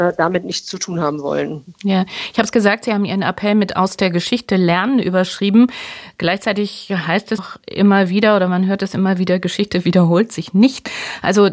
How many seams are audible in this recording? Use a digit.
1